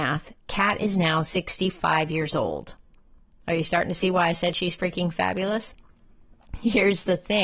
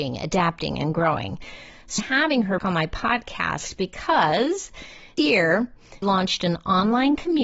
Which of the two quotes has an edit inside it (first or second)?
second